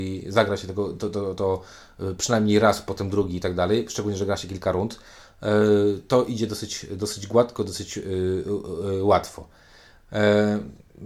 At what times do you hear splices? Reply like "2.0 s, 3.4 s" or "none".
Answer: none